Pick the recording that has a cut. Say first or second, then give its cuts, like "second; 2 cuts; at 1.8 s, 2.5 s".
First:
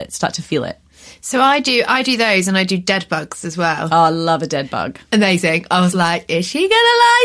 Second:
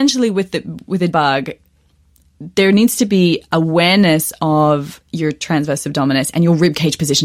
second; 1 cut; at 1.1 s